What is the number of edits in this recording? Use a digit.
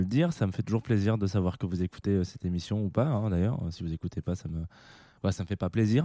0